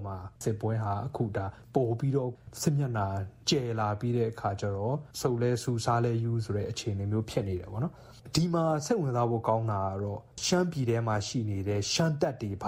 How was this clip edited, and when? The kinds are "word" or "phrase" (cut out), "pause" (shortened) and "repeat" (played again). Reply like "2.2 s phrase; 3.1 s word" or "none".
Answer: 5.1 s pause